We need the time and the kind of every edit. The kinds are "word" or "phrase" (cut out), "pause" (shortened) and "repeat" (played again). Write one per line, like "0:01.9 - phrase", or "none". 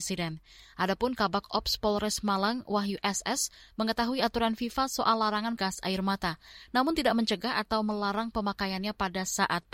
0:05.6 - word